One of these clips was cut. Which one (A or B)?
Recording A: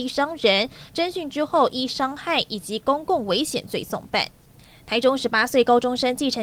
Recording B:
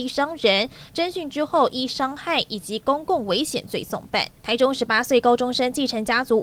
B